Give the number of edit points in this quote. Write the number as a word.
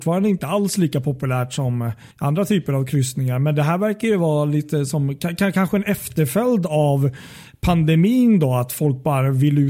one